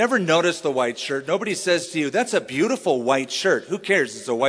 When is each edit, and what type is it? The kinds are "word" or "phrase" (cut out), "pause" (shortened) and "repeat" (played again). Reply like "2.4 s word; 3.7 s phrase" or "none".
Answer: none